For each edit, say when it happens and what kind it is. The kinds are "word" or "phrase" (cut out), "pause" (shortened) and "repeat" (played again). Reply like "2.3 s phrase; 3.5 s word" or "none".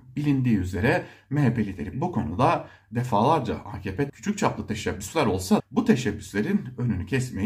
1.9 s word; 4.1 s word; 5.6 s word